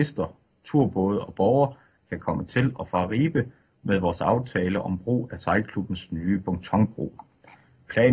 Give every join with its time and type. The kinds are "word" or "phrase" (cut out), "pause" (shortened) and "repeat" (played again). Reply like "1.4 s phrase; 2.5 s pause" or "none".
none